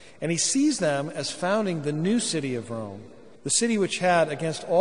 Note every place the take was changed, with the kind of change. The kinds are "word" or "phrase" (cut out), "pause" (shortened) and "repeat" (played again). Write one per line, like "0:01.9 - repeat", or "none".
0:03.3 - pause